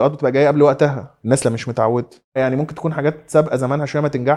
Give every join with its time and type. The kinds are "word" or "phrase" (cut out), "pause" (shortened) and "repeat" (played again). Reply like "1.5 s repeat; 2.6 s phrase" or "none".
1.4 s word